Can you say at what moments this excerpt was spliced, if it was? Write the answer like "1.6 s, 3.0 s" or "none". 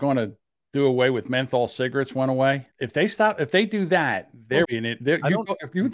2.7 s, 4.6 s